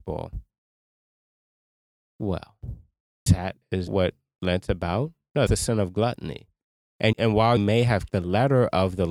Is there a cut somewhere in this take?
yes; 6 cuts; at 3.3 s, 3.9 s, 5.5 s, 7.1 s, 7.6 s, 8.1 s

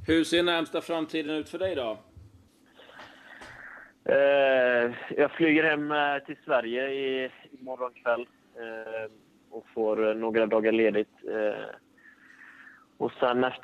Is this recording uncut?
yes; 0 cuts

